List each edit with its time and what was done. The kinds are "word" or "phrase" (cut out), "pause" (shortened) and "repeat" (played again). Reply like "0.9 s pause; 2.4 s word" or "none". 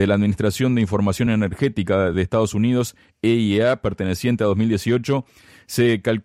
none